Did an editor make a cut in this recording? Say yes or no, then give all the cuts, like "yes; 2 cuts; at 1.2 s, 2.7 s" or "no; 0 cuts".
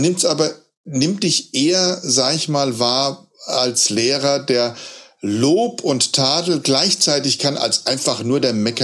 no; 0 cuts